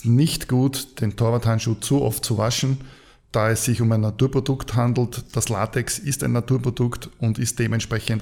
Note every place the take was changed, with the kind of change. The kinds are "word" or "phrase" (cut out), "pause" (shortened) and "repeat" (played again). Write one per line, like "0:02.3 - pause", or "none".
none